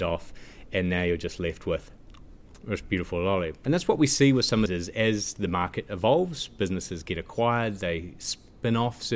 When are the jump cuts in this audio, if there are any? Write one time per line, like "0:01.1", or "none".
0:04.7